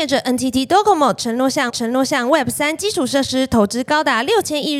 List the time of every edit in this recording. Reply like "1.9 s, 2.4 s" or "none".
1.7 s